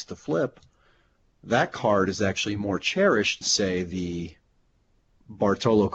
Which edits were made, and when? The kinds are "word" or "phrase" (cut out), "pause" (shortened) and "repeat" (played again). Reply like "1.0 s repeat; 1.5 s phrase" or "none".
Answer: 3.4 s word